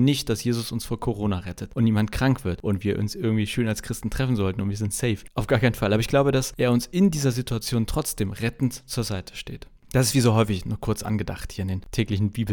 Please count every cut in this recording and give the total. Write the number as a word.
zero